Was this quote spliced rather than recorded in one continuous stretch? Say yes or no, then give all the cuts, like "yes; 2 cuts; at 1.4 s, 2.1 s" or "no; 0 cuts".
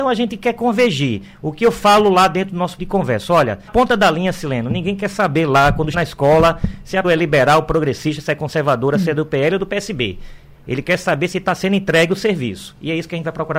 yes; 4 cuts; at 2.8 s, 3.7 s, 5.9 s, 7.0 s